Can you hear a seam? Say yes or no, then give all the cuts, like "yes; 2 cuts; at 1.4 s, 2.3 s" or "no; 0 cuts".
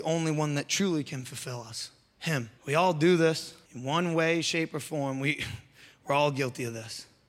yes; 2 cuts; at 2.6 s, 3.6 s